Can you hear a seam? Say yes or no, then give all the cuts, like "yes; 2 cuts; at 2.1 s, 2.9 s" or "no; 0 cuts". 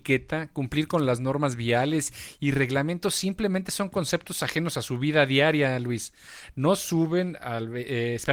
no; 0 cuts